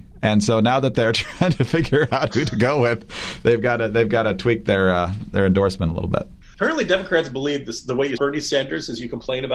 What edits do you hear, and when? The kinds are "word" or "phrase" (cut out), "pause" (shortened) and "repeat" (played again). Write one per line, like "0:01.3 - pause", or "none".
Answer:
0:08.2 - word